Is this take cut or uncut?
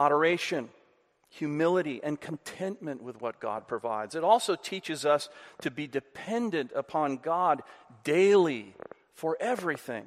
uncut